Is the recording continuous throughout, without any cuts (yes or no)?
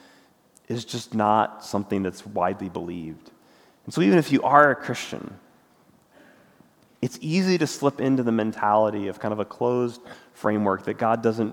yes